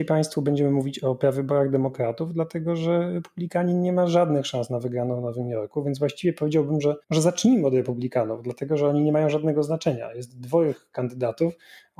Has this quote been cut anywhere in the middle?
yes; 1 cut; at 7.0 s

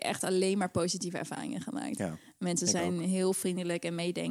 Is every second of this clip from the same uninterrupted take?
yes; 0 cuts

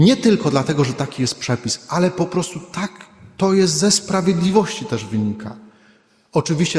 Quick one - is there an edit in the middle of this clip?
no; 0 cuts

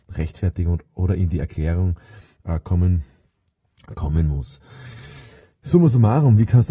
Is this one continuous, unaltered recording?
yes; 0 cuts

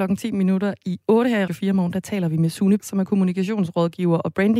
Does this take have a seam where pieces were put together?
yes; 2 cuts; at 1.5 s, 2.8 s

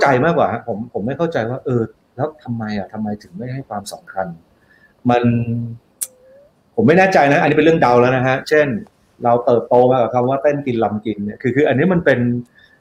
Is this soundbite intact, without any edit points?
yes; 0 cuts

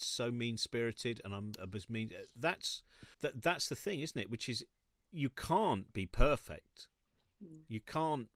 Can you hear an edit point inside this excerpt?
yes; 1 cut; at 3.1 s

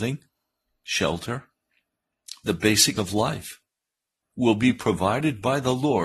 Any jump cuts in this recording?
yes; 1 cut; at 3.0 s

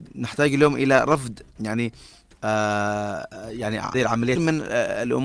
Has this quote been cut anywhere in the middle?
yes; 2 cuts; at 3.9 s, 4.4 s

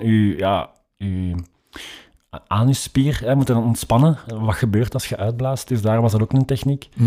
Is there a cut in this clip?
no; 0 cuts

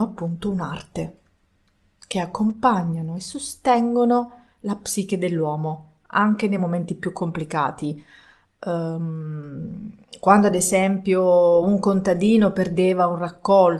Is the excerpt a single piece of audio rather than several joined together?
yes; 0 cuts

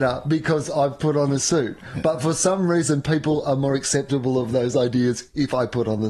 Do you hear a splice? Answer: no; 0 cuts

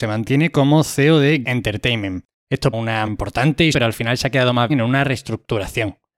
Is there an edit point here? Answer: yes; 5 cuts; at 1.4 s, 2.7 s, 3.1 s, 3.7 s, 4.7 s

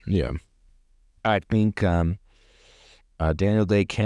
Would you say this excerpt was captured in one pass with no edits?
yes; 0 cuts

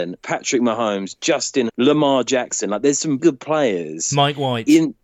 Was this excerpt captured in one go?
no; 2 cuts; at 1.7 s, 3.2 s

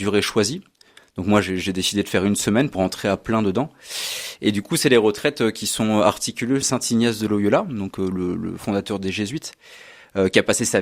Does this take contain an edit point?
yes; 2 cuts; at 2.7 s, 6.6 s

